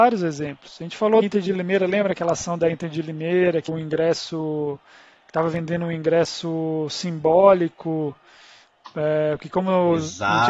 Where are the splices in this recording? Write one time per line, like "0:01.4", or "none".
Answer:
0:01.2
0:03.7